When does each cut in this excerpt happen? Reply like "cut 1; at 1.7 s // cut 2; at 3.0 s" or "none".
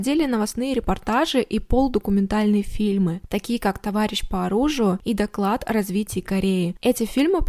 none